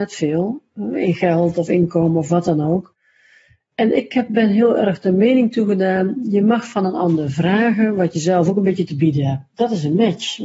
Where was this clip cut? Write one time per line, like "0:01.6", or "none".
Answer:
none